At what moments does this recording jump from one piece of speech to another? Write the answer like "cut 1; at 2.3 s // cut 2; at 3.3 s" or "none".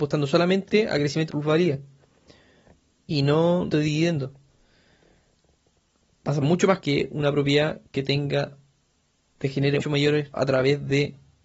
cut 1; at 1.3 s // cut 2; at 3.7 s // cut 3; at 6.4 s // cut 4; at 6.8 s // cut 5; at 9.8 s // cut 6; at 10.3 s